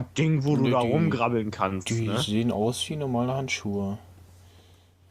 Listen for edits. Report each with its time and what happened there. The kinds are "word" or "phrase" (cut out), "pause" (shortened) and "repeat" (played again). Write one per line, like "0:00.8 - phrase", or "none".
none